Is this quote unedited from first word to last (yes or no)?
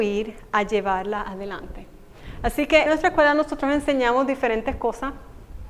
no